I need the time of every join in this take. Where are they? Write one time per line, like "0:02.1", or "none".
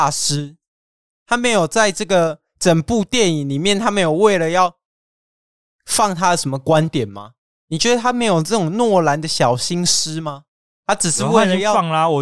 none